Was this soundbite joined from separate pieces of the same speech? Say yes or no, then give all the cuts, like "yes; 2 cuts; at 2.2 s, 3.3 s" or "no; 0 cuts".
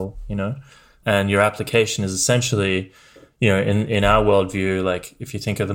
no; 0 cuts